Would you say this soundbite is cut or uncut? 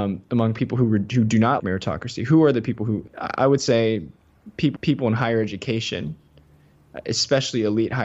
cut